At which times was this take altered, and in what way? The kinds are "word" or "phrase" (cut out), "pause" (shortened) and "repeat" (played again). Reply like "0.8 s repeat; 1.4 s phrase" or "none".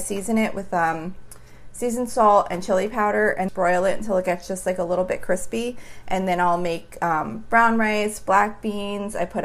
3.5 s phrase

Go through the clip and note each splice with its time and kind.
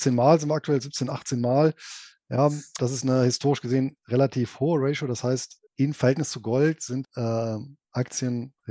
2.8 s word; 5.7 s pause; 7.0 s word

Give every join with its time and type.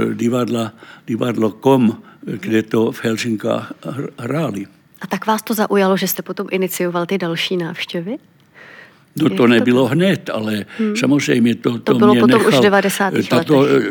none

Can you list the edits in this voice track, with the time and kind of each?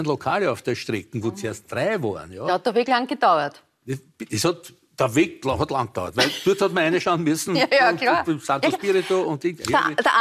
none

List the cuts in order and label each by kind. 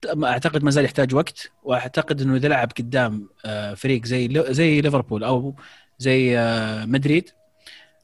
none

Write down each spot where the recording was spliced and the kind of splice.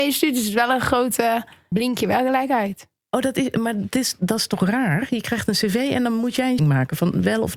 1.7 s word; 6.6 s word

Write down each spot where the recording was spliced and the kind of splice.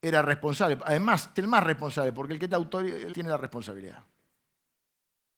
1.4 s word; 2.5 s word; 3.1 s word

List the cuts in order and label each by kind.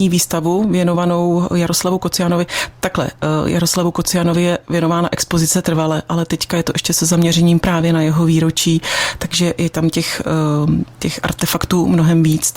none

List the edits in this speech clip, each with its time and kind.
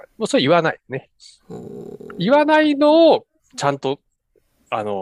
3.4 s pause

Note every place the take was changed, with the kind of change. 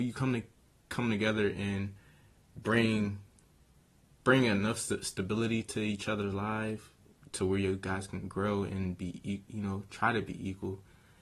none

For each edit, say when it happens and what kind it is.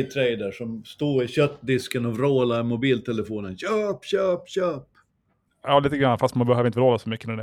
none

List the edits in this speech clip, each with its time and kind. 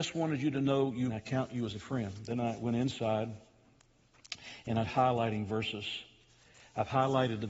1.1 s phrase; 4.8 s word

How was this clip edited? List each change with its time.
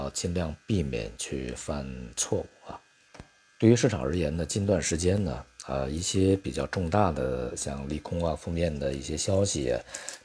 none

